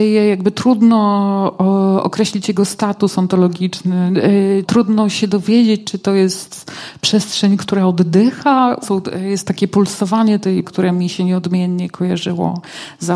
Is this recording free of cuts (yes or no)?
no